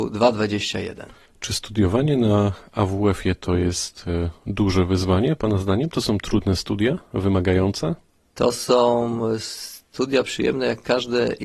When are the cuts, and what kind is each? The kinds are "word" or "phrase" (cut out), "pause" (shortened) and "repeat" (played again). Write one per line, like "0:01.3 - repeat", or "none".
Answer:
none